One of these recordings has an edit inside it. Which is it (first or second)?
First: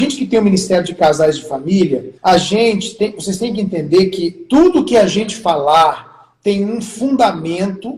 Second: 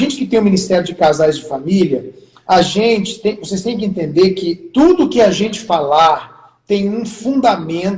first